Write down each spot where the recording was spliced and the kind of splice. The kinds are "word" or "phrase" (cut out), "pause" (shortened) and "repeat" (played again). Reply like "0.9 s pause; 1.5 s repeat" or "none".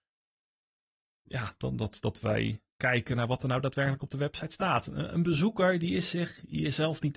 none